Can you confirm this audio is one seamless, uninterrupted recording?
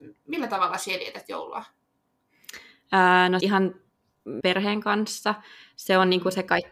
no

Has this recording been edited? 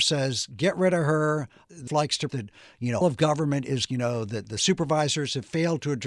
yes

